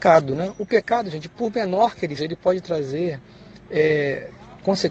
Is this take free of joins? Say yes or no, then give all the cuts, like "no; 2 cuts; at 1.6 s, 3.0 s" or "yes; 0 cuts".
no; 1 cut; at 2.2 s